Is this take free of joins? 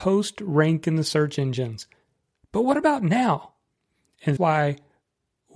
no; 1 cut; at 4.4 s

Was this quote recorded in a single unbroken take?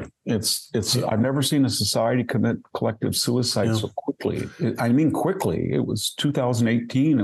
yes; 0 cuts

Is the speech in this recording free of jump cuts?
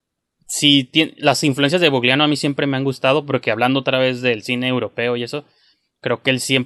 yes; 0 cuts

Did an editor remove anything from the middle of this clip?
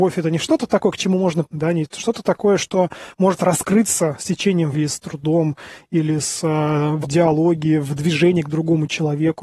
yes; 3 cuts; at 1.4 s, 4.7 s, 7.0 s

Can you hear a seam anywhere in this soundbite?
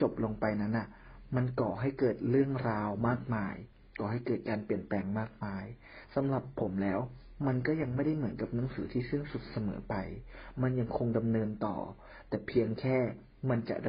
no; 0 cuts

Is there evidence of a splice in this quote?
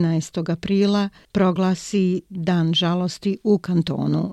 no; 0 cuts

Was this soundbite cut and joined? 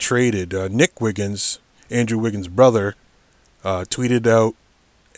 no; 0 cuts

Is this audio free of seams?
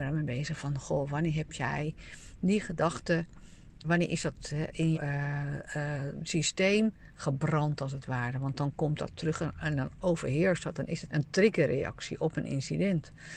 no; 3 cuts; at 3.8 s, 4.9 s, 11.1 s

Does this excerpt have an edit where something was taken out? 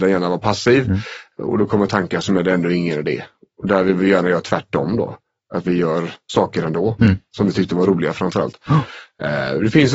no; 0 cuts

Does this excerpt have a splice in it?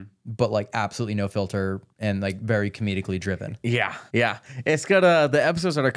yes; 2 cuts; at 1.9 s, 4.1 s

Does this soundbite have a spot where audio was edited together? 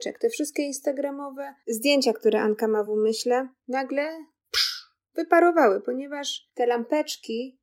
no; 0 cuts

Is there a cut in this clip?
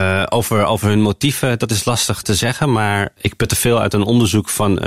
yes; 1 cut; at 2.2 s

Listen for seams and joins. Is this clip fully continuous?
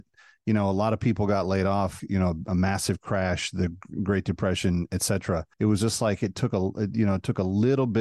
no; 2 cuts; at 2.0 s, 5.5 s

